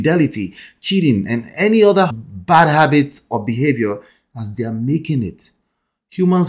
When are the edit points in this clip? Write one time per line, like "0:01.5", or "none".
0:02.1